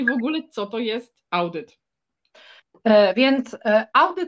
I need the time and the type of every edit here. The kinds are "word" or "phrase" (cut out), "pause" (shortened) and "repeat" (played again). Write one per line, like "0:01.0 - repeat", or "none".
0:01.3 - pause